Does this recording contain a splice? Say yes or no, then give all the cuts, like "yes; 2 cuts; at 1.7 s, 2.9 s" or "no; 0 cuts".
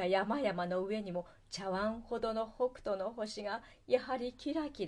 no; 0 cuts